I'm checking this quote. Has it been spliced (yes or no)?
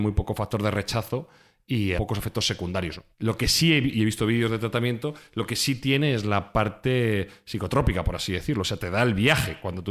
yes